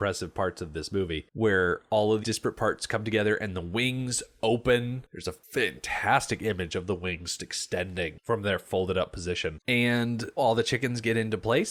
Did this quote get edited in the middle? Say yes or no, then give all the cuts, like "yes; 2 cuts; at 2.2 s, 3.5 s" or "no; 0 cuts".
yes; 3 cuts; at 2.2 s, 7.4 s, 10.4 s